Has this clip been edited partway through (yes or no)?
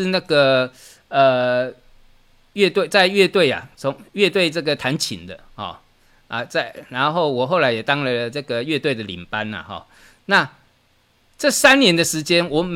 no